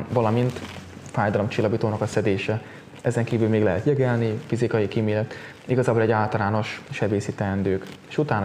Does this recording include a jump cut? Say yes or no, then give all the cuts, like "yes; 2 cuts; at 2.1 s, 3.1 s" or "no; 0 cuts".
no; 0 cuts